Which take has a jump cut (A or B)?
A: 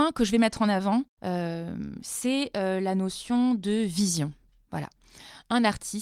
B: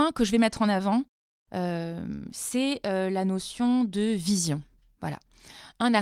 A